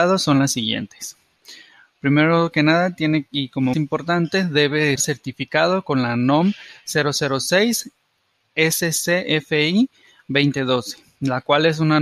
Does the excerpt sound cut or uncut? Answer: cut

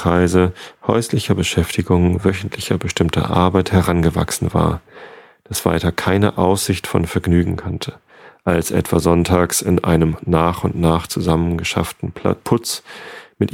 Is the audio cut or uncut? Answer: uncut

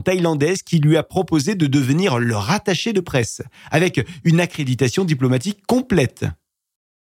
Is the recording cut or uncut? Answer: uncut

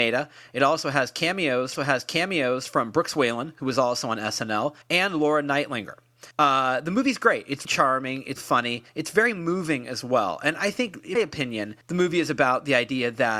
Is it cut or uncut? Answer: cut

